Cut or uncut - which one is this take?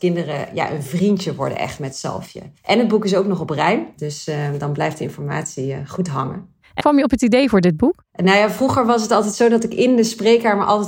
cut